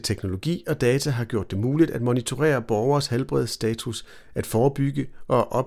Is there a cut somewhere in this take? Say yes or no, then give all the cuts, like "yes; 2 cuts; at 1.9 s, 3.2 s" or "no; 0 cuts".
no; 0 cuts